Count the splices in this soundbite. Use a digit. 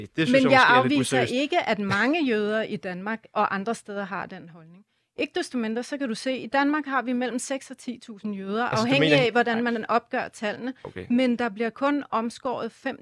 0